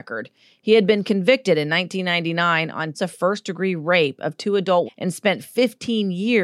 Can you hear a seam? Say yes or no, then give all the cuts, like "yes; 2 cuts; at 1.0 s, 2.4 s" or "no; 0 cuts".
yes; 2 cuts; at 2.9 s, 4.9 s